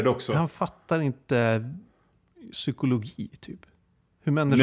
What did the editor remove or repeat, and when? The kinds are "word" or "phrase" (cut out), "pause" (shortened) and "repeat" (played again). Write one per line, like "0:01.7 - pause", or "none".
none